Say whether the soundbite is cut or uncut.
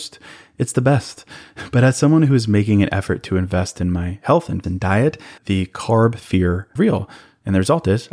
cut